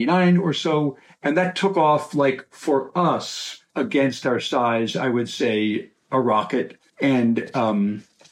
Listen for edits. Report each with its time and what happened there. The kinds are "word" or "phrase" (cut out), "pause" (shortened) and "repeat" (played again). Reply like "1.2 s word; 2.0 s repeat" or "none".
3.7 s pause; 6.9 s pause